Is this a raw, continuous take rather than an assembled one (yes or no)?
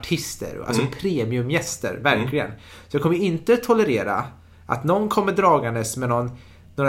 yes